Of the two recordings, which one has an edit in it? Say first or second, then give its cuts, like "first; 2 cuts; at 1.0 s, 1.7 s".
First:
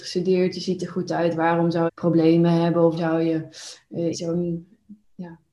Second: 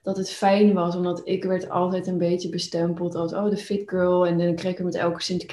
first; 3 cuts; at 1.9 s, 3.0 s, 4.1 s